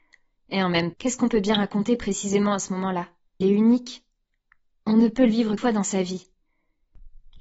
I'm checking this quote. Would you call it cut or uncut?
cut